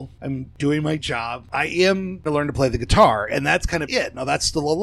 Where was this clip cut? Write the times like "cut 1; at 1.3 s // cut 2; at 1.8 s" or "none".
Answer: cut 1; at 1.0 s // cut 2; at 2.3 s // cut 3; at 3.9 s